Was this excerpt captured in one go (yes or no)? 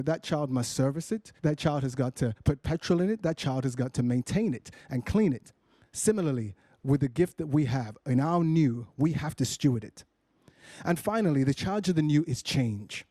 no